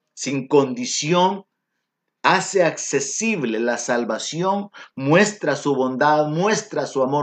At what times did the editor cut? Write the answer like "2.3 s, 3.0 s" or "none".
none